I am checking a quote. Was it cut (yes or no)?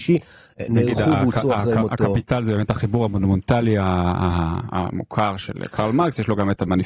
no